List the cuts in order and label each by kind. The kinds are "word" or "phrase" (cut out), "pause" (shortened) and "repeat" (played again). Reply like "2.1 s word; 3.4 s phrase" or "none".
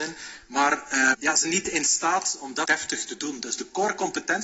1.1 s word; 1.4 s word; 2.6 s word